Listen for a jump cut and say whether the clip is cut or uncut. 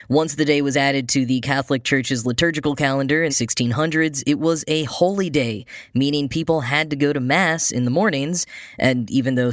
cut